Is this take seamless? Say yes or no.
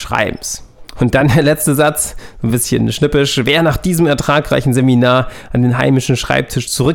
yes